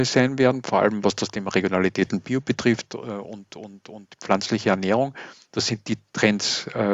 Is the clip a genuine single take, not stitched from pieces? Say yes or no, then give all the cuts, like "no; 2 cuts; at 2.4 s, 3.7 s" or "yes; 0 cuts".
yes; 0 cuts